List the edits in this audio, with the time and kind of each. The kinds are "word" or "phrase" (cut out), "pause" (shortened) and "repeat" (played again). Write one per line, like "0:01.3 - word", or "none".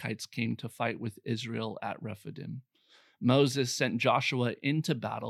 none